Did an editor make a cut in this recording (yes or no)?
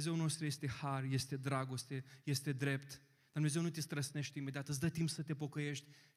no